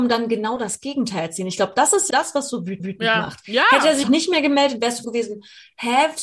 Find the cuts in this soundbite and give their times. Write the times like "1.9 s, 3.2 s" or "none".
2.1 s, 2.8 s, 4.0 s, 5.0 s